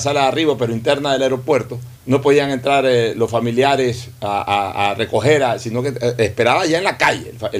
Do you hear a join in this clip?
yes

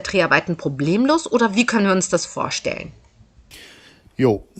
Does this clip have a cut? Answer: no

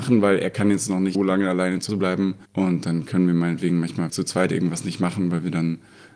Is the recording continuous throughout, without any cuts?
no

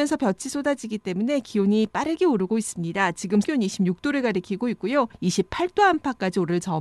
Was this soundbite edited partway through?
yes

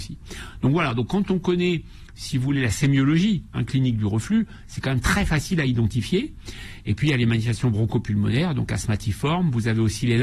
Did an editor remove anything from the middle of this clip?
no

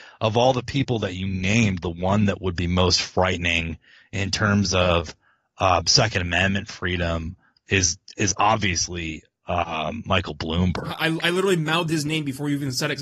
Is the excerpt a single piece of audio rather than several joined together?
yes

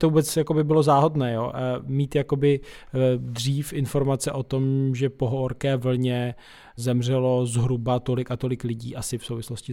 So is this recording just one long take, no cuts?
yes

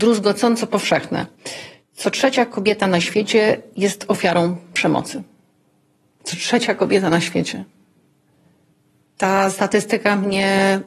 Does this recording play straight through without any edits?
yes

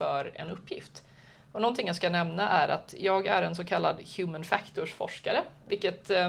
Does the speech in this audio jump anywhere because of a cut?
no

